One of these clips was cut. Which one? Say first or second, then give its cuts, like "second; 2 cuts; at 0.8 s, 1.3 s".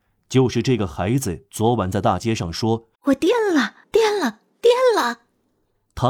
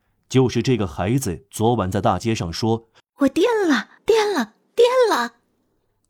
first; 1 cut; at 2.9 s